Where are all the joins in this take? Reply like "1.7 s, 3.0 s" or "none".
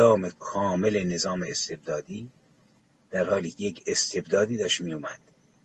none